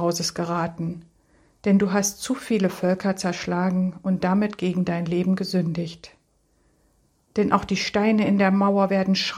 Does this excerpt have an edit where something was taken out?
no; 0 cuts

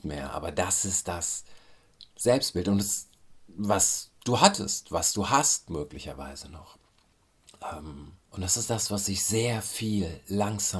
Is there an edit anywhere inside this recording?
yes; 3 cuts; at 2.1 s, 4.2 s, 8.2 s

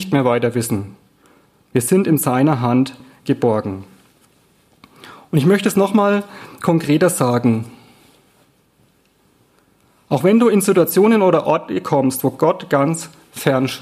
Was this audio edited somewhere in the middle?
no; 0 cuts

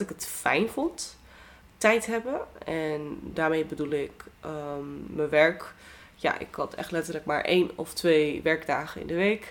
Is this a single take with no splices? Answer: yes; 0 cuts

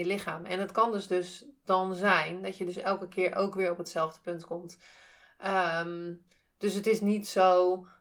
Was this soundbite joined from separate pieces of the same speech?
no; 0 cuts

